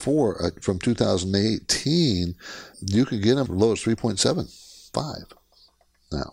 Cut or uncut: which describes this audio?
cut